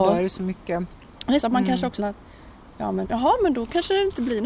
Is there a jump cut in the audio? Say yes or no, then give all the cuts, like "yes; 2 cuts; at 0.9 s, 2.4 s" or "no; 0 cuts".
yes; 3 cuts; at 1.4 s, 2.0 s, 3.0 s